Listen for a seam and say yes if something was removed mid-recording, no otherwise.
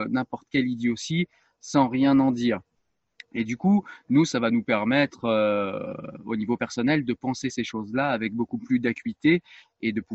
no